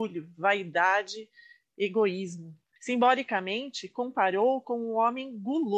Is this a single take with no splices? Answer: yes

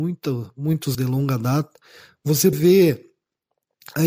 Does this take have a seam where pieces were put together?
yes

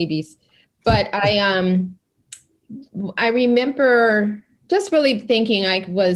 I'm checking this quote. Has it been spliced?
no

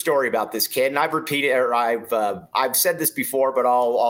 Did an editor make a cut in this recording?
no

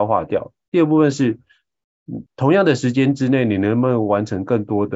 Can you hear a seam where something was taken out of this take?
yes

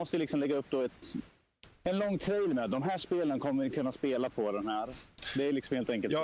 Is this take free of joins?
yes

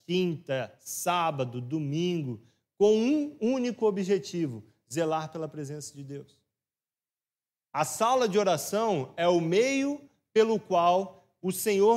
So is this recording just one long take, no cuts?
yes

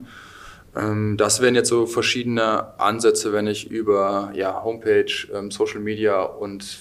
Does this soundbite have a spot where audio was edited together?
no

